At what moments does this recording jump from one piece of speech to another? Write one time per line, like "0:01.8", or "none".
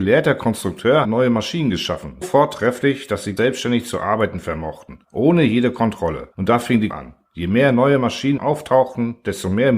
0:01.0
0:02.2
0:03.4
0:05.0
0:06.3
0:06.9
0:08.4